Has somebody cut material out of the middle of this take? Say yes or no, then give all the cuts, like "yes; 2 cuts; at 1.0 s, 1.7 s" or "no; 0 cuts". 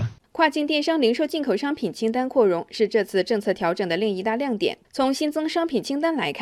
yes; 1 cut; at 4.8 s